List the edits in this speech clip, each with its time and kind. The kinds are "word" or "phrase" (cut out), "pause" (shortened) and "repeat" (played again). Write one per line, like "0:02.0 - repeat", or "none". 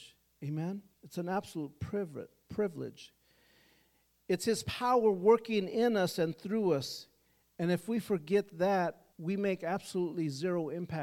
0:00.9 - pause
0:09.1 - pause